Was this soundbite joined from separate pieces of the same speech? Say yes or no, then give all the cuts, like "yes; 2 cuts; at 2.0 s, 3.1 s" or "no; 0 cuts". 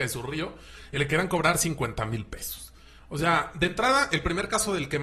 no; 0 cuts